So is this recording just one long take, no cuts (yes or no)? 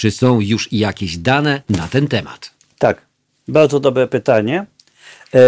yes